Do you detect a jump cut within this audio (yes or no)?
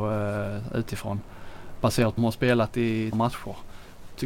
yes